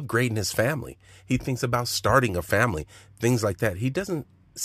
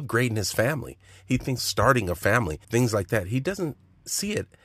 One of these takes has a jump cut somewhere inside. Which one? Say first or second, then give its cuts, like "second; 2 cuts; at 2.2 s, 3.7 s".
second; 2 cuts; at 1.6 s, 2.6 s